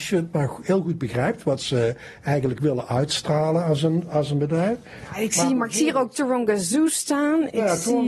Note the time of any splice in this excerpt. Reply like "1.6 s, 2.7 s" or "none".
none